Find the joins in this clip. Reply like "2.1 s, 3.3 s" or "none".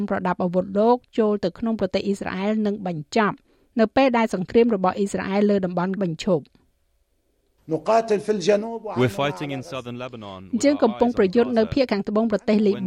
6.0 s